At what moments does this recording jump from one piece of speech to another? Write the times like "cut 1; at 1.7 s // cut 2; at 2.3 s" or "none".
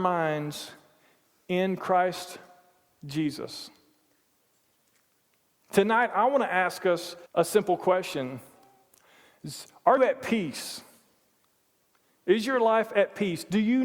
cut 1; at 7.3 s // cut 2; at 10.0 s